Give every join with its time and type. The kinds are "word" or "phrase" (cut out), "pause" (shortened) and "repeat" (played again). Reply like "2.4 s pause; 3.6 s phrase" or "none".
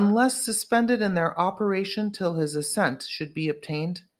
none